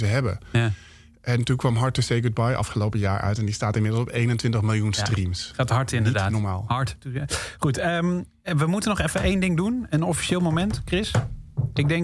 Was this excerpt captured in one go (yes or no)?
yes